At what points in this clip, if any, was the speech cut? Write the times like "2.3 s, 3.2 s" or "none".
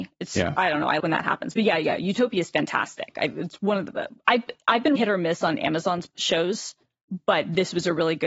1.0 s, 4.2 s, 5.0 s, 6.1 s